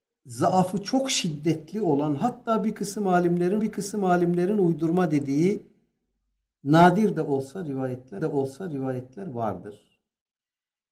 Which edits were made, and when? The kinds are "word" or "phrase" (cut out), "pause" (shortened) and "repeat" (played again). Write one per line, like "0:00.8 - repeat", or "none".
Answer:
0:03.6 - repeat
0:08.2 - repeat